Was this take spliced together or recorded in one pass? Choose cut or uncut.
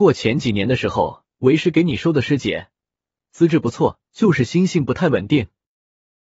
cut